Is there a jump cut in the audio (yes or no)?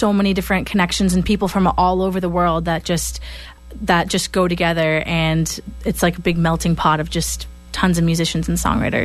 no